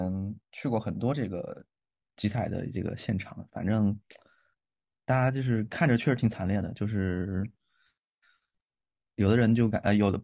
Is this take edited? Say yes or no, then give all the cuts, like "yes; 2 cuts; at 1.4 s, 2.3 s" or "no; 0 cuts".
no; 0 cuts